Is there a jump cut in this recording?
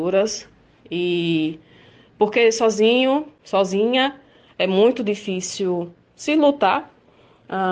no; 0 cuts

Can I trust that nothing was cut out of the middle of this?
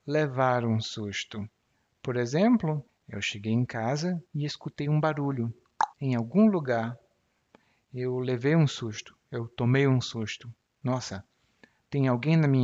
no; 4 cuts; at 1.7 s, 2.9 s, 4.3 s, 5.9 s

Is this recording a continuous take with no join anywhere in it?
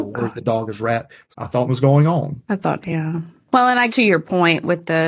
no; 4 cuts; at 1.3 s, 1.7 s, 2.8 s, 3.9 s

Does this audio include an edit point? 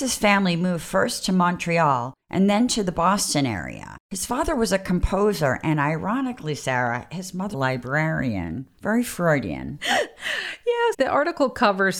yes; 4 cuts; at 2.2 s, 4.0 s, 7.5 s, 10.9 s

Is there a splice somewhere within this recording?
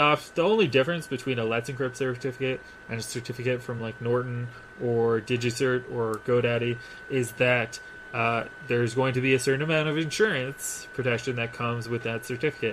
no; 0 cuts

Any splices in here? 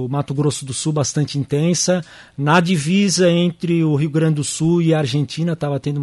no; 0 cuts

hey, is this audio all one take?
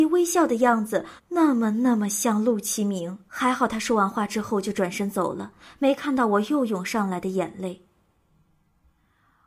no; 2 cuts; at 1.2 s, 3.3 s

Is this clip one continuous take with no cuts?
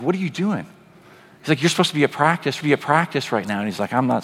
no; 1 cut; at 2.6 s

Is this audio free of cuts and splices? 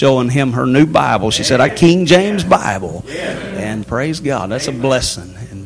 no; 2 cuts; at 1.7 s, 3.8 s

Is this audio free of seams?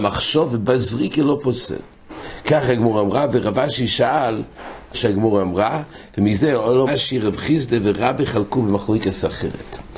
no; 2 cuts; at 4.9 s, 6.9 s

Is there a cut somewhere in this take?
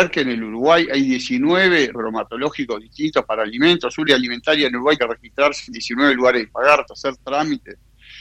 yes; 5 cuts; at 1.9 s, 4.1 s, 5.0 s, 6.5 s, 6.9 s

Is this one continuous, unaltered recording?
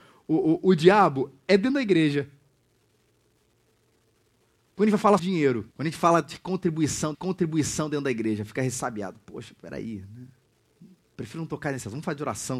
no; 4 cuts; at 5.2 s, 5.7 s, 7.1 s, 9.6 s

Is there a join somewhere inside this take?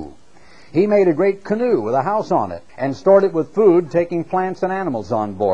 yes; 1 cut; at 2.7 s

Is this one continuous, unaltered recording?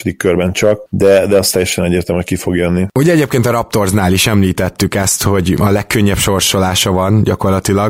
yes; 0 cuts

